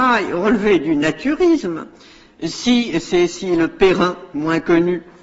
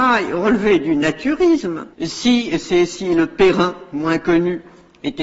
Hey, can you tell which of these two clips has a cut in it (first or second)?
second